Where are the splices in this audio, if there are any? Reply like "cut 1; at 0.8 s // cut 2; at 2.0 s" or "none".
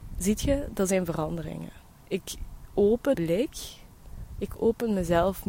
cut 1; at 3.1 s